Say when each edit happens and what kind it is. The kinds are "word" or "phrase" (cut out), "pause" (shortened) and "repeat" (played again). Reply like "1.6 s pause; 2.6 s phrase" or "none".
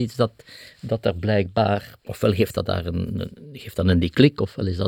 2.0 s pause